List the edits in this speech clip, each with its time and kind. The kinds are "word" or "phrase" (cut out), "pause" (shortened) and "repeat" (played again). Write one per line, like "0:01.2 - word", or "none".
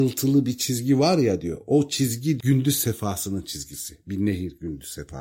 none